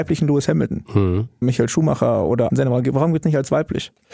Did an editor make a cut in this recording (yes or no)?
yes